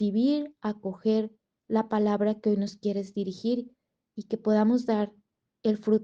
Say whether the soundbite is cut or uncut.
uncut